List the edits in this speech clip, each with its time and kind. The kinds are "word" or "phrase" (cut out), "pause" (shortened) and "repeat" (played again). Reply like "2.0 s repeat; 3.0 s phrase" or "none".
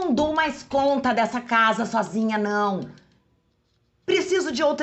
none